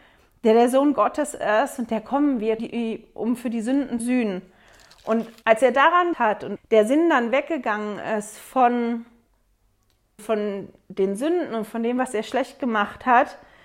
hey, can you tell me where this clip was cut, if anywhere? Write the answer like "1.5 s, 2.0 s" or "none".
2.6 s, 4.0 s, 5.4 s, 6.1 s, 6.6 s, 10.2 s